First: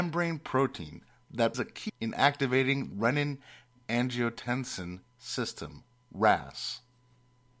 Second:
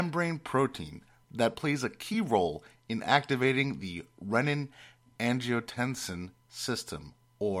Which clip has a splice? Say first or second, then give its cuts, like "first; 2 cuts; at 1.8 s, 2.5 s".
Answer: first; 4 cuts; at 1.5 s, 1.9 s, 2.9 s, 6.0 s